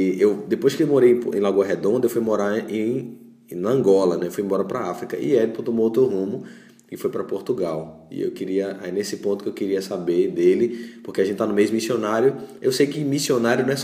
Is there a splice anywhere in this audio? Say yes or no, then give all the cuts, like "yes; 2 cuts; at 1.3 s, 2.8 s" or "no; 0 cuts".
no; 0 cuts